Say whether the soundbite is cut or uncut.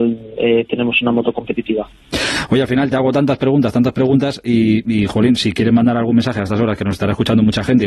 uncut